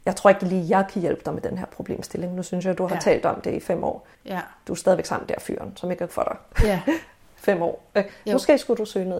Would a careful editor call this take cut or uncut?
cut